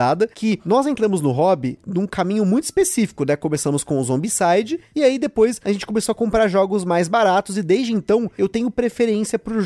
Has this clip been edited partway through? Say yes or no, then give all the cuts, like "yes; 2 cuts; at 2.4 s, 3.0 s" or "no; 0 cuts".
no; 0 cuts